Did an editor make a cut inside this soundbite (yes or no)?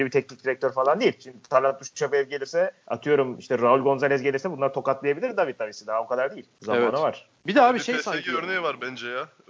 yes